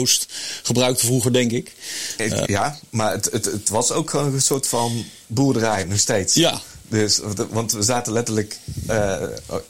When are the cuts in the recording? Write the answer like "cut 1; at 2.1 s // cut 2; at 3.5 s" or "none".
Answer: cut 1; at 2.4 s